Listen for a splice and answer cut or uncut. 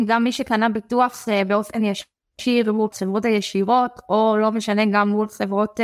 cut